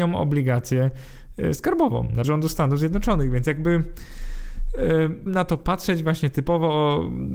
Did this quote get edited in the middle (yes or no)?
yes